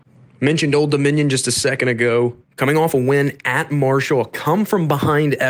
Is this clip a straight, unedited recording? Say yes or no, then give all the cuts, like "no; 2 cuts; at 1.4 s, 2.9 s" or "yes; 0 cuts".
no; 1 cut; at 2.4 s